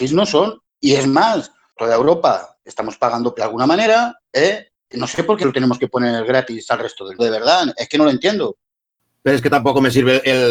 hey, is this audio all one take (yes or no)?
no